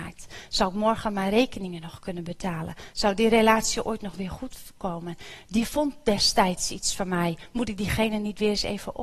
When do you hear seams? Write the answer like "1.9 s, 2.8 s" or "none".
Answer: none